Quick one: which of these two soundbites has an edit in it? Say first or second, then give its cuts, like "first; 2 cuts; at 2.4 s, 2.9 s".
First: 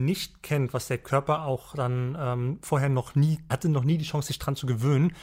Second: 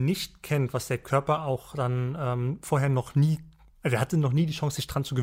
first; 1 cut; at 3.5 s